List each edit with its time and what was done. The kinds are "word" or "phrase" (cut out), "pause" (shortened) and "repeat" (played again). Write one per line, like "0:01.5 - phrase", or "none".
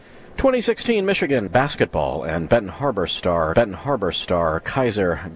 0:01.5 - word
0:03.5 - repeat